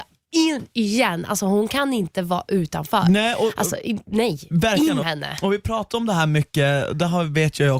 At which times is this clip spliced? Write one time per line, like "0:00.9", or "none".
0:05.0